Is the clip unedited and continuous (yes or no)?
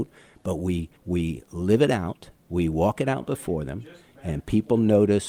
no